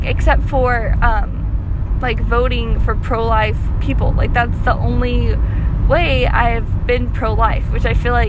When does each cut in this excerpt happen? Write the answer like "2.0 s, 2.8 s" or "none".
none